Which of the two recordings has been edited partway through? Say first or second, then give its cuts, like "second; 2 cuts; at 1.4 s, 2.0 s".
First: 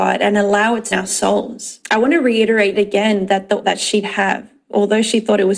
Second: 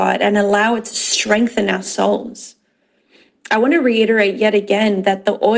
first; 5 cuts; at 0.9 s, 1.8 s, 2.7 s, 3.6 s, 4.0 s